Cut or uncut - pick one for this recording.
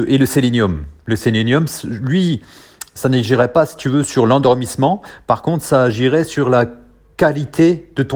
uncut